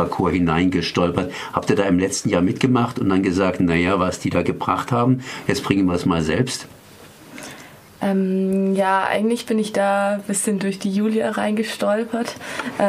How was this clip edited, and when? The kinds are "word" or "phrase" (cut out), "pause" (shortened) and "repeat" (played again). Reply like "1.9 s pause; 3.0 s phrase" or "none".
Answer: none